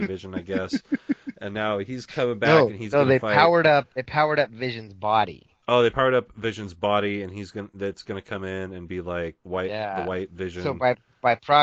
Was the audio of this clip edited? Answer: yes; 3 cuts; at 3.9 s, 5.6 s, 9.4 s

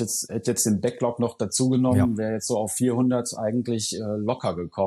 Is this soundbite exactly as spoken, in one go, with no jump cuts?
yes; 0 cuts

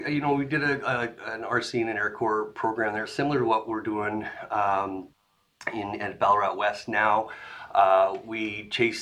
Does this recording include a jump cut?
no; 0 cuts

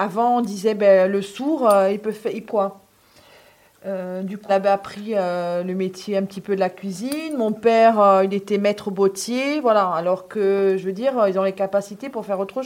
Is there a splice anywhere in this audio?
yes; 2 cuts; at 2.5 s, 4.5 s

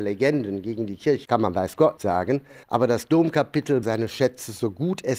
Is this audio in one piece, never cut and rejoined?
no; 4 cuts; at 1.3 s, 2.0 s, 2.6 s, 3.8 s

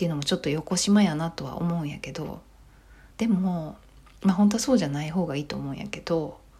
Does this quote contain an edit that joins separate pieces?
yes; 1 cut; at 3.1 s

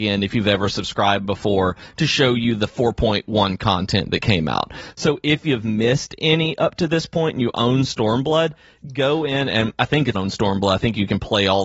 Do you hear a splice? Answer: yes; 1 cut; at 10.1 s

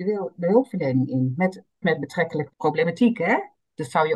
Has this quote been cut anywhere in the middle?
yes; 2 cuts; at 1.8 s, 2.5 s

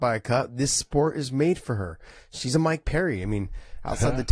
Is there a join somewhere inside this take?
no; 0 cuts

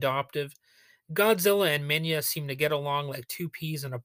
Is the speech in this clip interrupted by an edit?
no; 0 cuts

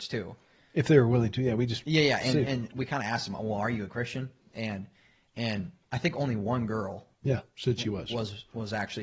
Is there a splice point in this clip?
no; 0 cuts

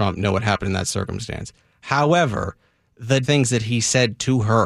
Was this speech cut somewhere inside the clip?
yes; 1 cut; at 3.2 s

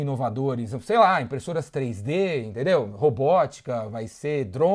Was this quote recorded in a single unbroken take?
yes; 0 cuts

